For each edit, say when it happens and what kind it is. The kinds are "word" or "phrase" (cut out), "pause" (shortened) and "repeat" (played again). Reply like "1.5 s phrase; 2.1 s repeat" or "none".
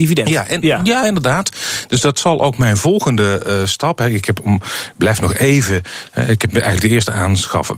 none